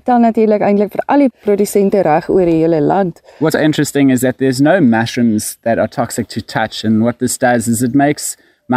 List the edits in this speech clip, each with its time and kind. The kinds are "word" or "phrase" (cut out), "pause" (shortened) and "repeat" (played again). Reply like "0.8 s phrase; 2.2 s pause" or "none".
3.5 s word

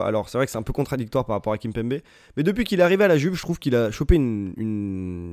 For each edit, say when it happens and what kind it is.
none

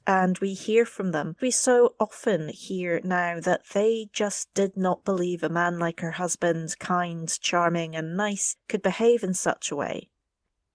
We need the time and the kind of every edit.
1.4 s word

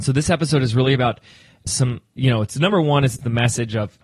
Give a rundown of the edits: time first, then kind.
none

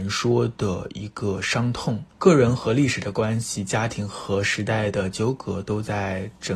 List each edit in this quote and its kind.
2.1 s pause

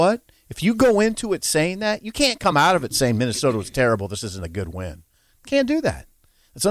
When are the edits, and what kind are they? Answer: none

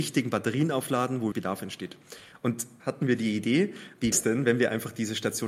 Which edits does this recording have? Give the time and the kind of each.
1.3 s word; 2.8 s word; 4.1 s word

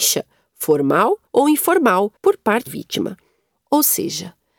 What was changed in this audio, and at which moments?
1.3 s pause; 2.2 s pause; 2.7 s word

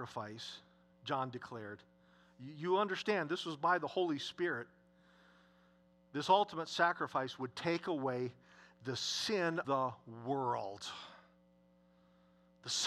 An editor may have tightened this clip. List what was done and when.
9.6 s word

